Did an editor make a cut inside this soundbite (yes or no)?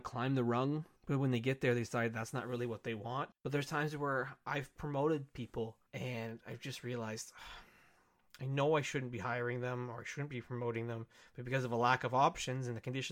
yes